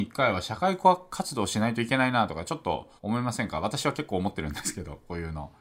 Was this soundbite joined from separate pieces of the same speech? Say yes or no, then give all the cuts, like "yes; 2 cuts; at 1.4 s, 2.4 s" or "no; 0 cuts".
yes; 1 cut; at 3.0 s